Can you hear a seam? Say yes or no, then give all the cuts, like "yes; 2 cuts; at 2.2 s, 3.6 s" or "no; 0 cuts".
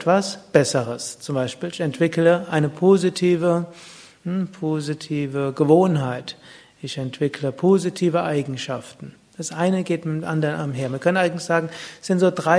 no; 0 cuts